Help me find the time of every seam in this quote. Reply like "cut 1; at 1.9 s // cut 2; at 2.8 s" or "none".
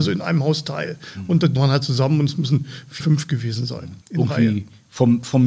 cut 1; at 1.6 s // cut 2; at 3.0 s // cut 3; at 4.0 s